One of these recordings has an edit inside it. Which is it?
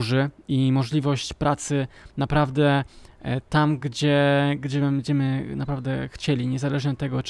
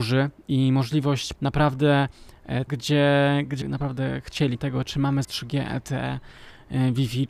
second; 5 cuts; at 1.3 s, 2.7 s, 3.6 s, 4.5 s, 5.2 s

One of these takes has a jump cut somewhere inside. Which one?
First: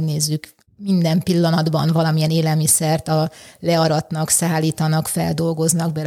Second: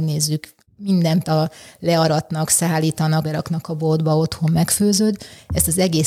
second; 2 cuts; at 1.2 s, 3.2 s

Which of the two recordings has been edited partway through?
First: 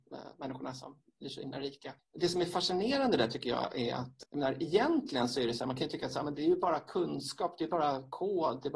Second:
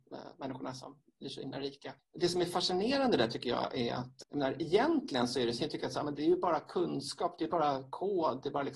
second; 1 cut; at 5.6 s

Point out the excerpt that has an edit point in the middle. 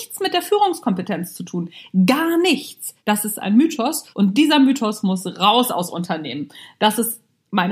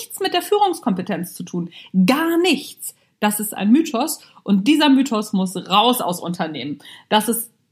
first; 2 cuts; at 3.0 s, 4.1 s

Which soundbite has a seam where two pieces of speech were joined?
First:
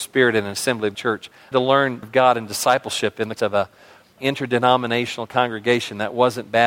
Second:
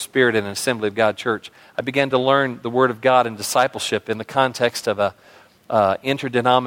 first; 5 cuts; at 0.9 s, 1.5 s, 2.0 s, 3.4 s, 4.2 s

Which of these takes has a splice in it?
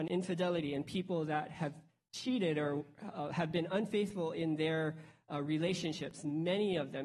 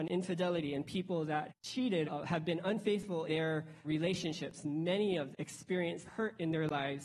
second; 6 cuts; at 1.5 s, 2.0 s, 3.3 s, 3.8 s, 5.3 s, 6.1 s

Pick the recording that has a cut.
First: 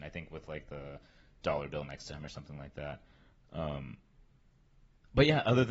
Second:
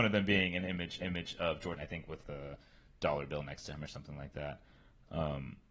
second; 3 cuts; at 1.0 s, 1.8 s, 2.2 s

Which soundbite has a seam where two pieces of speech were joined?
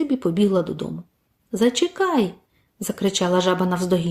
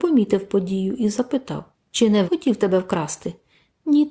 second; 2 cuts; at 1.7 s, 2.2 s

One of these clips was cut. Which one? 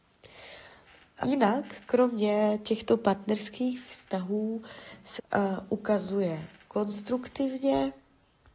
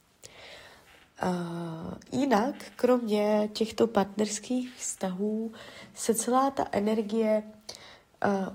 first; 2 cuts; at 1.2 s, 5.2 s

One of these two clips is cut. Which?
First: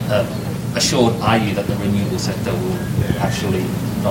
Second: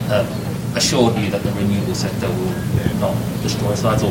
second; 2 cuts; at 1.2 s, 2.9 s

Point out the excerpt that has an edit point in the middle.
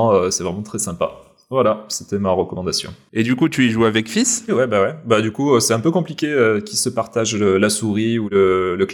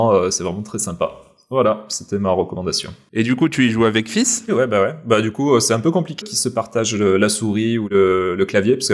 second; 1 cut; at 6.2 s

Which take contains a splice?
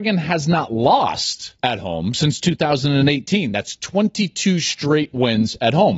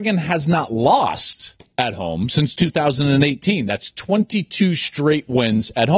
first; 1 cut; at 1.6 s

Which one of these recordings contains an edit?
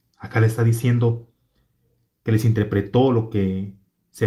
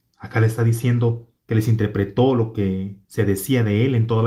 second; 2 cuts; at 1.4 s, 3.0 s

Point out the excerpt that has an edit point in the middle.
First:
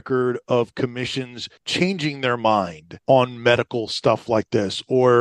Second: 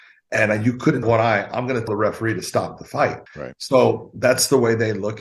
second; 3 cuts; at 1.0 s, 1.9 s, 3.3 s

